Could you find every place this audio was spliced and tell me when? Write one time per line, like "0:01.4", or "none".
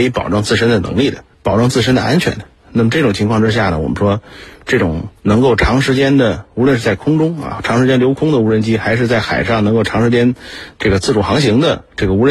0:01.3
0:05.2